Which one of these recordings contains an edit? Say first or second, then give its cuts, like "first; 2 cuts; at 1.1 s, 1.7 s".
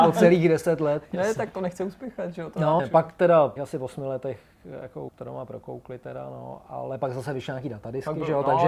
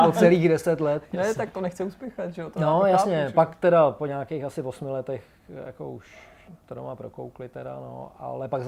first; 3 cuts; at 2.8 s, 3.6 s, 5.1 s